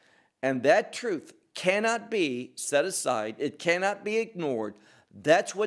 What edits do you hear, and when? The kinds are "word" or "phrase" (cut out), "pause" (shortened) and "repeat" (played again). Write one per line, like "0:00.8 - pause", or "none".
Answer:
none